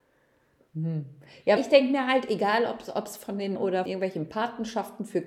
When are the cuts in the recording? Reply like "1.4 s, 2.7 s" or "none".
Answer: 1.6 s, 3.6 s, 3.9 s